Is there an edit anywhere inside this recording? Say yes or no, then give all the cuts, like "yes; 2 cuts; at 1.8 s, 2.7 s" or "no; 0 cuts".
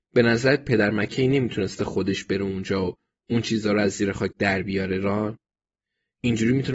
no; 0 cuts